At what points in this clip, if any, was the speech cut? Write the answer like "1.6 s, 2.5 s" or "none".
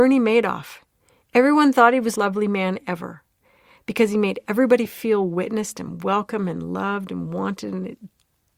2.2 s